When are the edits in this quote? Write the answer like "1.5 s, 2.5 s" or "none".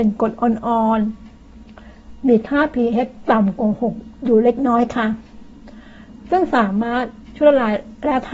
none

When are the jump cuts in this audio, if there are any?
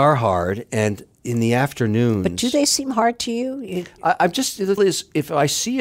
1.1 s, 4.8 s

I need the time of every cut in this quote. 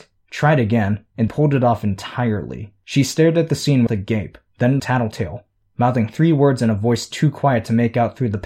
1.3 s, 2.8 s, 3.9 s, 4.8 s

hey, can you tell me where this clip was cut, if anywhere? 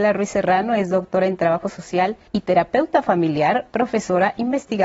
2.3 s

